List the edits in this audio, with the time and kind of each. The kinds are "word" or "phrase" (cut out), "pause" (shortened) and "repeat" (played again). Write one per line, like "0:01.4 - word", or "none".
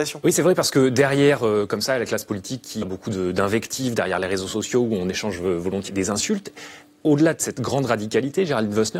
0:02.8 - word
0:05.9 - word